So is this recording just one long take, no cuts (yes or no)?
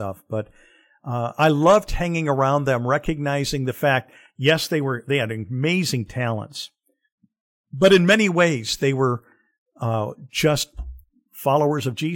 yes